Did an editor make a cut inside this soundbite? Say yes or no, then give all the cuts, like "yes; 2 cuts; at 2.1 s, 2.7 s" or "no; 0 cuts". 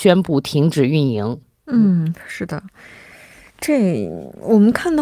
no; 0 cuts